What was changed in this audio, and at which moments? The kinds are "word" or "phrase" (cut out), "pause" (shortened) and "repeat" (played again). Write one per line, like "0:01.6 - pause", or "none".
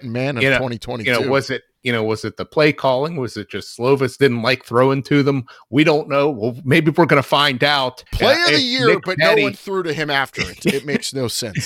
0:08.1 - pause